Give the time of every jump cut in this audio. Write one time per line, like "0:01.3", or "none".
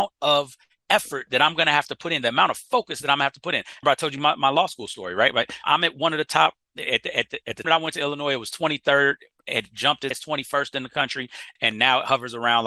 0:03.8
0:05.6
0:07.6
0:10.1
0:11.6